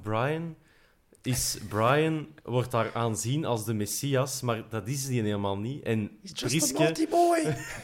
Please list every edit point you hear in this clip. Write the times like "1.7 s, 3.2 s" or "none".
none